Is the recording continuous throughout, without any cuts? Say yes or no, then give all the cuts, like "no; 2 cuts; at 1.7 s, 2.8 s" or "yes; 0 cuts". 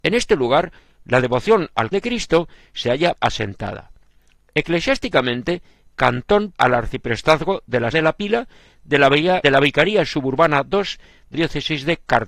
no; 7 cuts; at 1.9 s, 3.1 s, 5.9 s, 6.5 s, 7.9 s, 9.4 s, 11.3 s